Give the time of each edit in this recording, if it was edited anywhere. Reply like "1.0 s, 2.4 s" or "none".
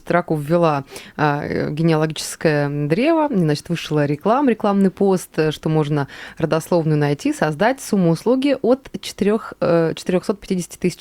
none